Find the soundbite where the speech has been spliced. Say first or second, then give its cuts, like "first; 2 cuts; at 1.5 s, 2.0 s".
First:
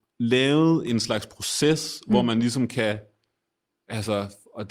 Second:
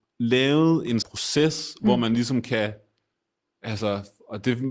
second; 1 cut; at 1.0 s